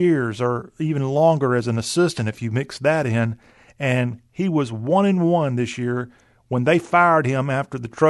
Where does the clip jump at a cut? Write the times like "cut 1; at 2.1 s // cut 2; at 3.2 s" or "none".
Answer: none

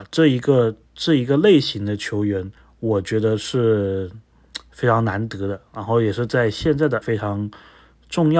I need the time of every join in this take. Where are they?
cut 1; at 2.6 s // cut 2; at 7.0 s

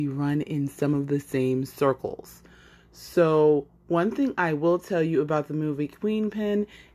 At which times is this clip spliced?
none

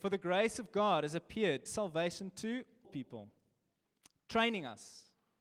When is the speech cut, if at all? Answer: cut 1; at 1.7 s // cut 2; at 2.8 s

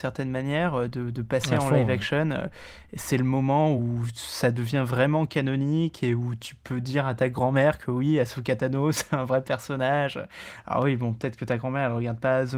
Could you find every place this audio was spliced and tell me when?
none

